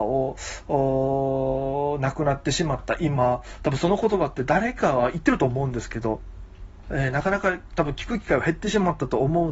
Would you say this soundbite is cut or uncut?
cut